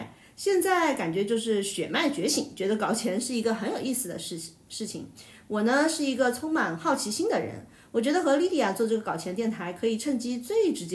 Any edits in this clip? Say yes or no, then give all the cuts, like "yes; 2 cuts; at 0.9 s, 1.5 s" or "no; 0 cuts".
no; 0 cuts